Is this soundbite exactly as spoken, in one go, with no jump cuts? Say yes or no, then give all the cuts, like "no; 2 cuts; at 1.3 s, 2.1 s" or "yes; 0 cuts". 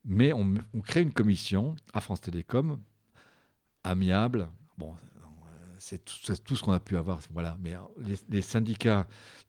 no; 1 cut; at 4.6 s